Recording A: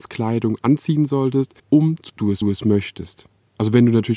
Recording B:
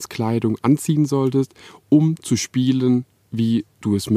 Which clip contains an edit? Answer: A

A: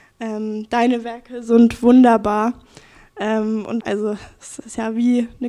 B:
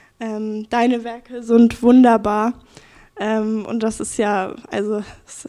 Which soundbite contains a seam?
A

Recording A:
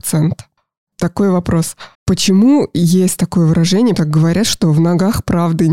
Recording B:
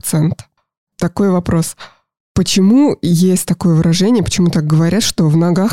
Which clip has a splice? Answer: A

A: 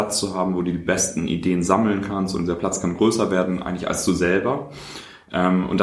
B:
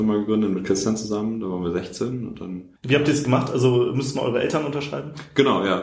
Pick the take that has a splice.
B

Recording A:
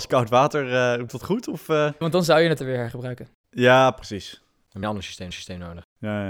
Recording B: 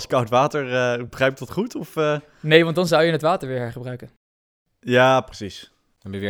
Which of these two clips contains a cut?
A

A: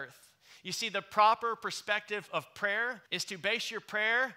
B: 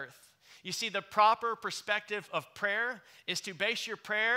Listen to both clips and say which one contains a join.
A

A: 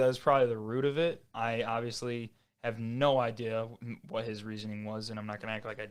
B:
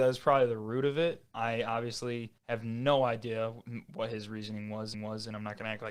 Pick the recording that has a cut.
B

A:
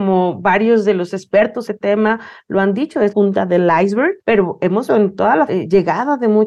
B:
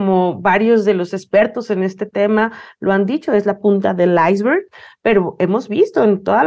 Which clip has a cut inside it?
A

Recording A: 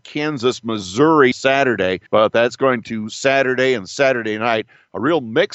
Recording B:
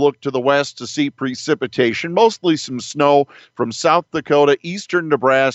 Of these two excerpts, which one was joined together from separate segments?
A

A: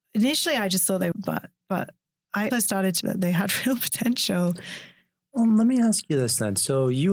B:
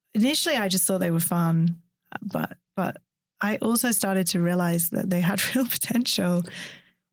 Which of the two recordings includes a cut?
A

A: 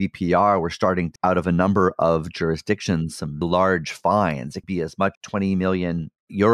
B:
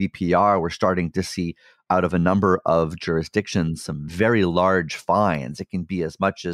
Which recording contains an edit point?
A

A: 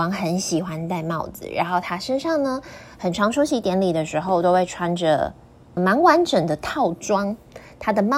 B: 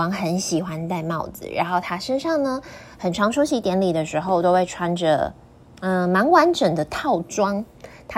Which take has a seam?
A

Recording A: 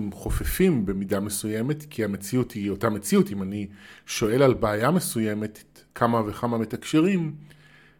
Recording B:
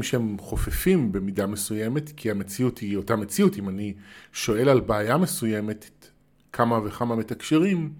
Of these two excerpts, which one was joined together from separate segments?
A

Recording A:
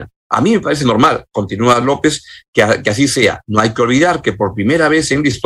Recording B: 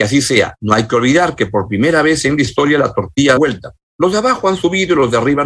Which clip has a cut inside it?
B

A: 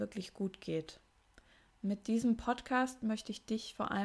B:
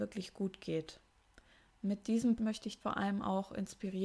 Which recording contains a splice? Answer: B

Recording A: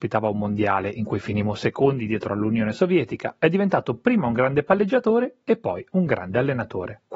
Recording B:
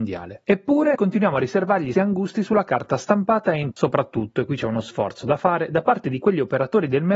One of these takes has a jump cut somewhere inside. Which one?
B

